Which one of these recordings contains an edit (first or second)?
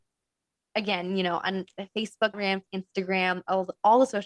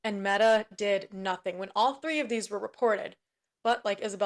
first